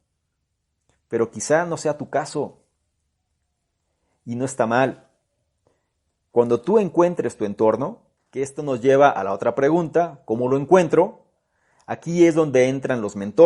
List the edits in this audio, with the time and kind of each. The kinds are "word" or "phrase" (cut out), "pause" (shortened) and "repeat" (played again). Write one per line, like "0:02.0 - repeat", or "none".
none